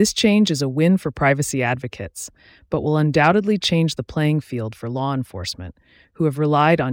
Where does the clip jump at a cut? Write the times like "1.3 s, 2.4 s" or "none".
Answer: none